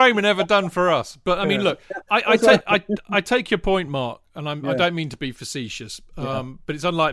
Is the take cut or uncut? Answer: uncut